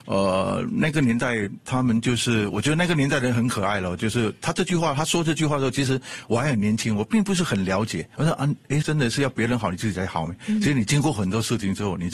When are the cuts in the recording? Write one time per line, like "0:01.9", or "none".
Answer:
0:08.1
0:08.8